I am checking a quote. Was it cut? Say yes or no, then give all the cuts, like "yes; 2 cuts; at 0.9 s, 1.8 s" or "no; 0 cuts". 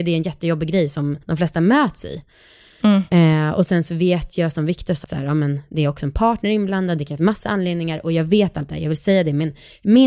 yes; 3 cuts; at 1.2 s, 5.0 s, 7.2 s